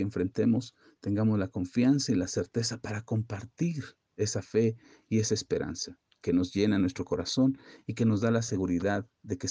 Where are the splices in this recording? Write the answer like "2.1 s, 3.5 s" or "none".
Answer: none